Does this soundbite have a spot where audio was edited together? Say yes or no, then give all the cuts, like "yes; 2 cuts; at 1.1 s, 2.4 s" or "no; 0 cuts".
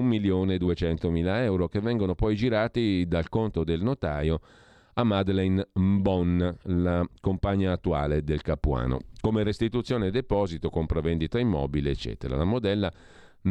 no; 0 cuts